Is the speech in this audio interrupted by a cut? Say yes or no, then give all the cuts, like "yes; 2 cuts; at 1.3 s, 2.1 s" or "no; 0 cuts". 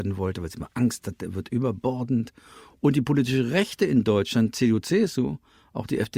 no; 0 cuts